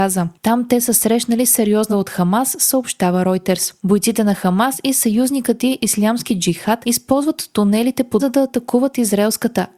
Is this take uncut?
no; 2 cuts; at 1.9 s, 8.2 s

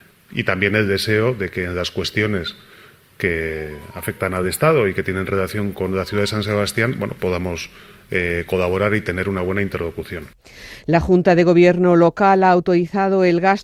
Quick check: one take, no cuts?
yes; 0 cuts

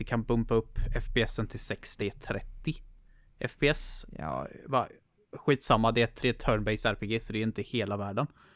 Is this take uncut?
no; 2 cuts; at 2.0 s, 6.2 s

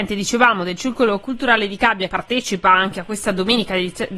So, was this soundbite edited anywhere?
yes; 2 cuts; at 1.2 s, 2.1 s

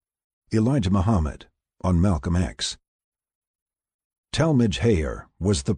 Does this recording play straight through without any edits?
yes; 0 cuts

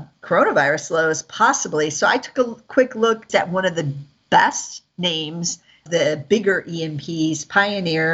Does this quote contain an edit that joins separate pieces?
yes; 2 cuts; at 3.3 s, 5.9 s

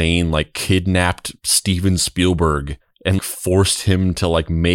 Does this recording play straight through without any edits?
no; 1 cut; at 3.2 s

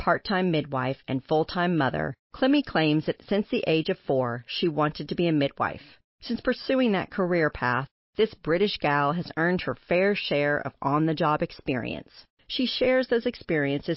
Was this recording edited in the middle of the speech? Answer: no; 0 cuts

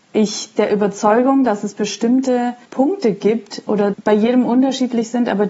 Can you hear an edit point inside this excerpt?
yes; 3 cuts; at 1.5 s, 2.7 s, 3.9 s

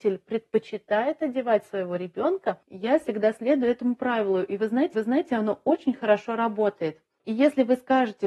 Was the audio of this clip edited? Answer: yes; 1 cut; at 4.9 s

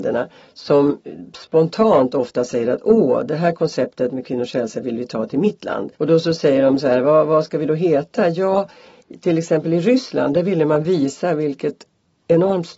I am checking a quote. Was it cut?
yes; 1 cut; at 5.9 s

